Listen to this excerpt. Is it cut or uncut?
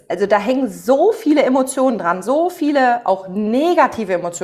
uncut